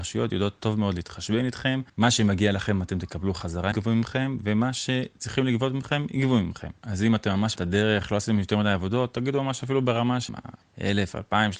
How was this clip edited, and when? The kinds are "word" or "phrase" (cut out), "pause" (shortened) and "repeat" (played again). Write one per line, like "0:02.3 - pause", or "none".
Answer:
0:03.7 - phrase
0:06.8 - pause
0:07.6 - word
0:10.3 - phrase
0:10.6 - pause